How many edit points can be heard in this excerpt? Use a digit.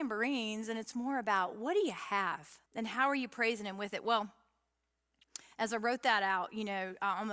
1